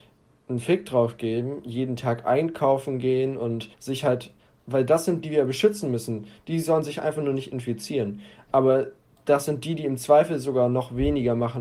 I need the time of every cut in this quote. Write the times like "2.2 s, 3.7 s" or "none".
3.7 s, 5.2 s